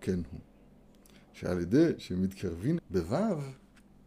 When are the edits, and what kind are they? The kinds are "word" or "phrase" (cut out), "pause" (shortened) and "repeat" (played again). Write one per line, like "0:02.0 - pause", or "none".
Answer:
0:02.8 - phrase